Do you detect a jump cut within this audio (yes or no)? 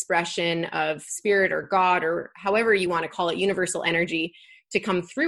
no